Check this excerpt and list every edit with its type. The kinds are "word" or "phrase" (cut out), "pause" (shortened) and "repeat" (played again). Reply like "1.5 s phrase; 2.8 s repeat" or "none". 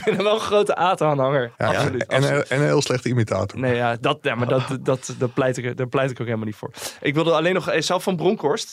1.5 s pause